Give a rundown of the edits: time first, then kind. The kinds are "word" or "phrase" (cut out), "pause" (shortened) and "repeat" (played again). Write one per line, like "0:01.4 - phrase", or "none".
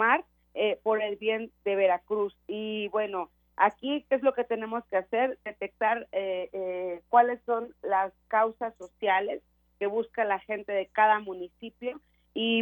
none